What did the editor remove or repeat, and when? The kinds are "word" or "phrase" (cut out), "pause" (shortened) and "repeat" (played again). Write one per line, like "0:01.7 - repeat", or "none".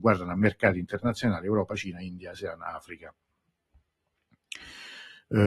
none

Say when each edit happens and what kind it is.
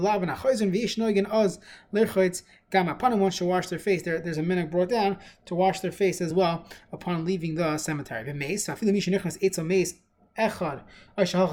none

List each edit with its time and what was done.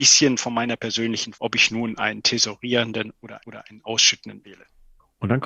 0:01.3 - phrase
0:03.4 - repeat
0:04.4 - word

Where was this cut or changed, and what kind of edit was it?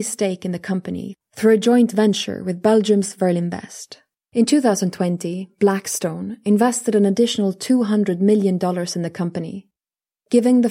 0:04.1 - pause

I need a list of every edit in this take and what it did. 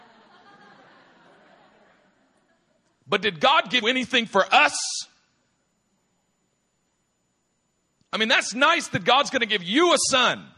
0:03.8 - word

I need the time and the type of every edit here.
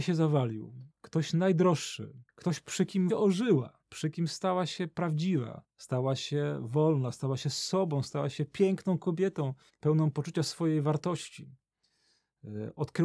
0:00.9 - pause
0:02.3 - pause
0:03.1 - word
0:03.8 - pause
0:05.7 - pause
0:09.7 - pause

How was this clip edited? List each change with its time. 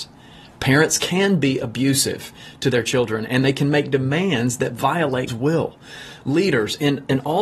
0:05.3 - word

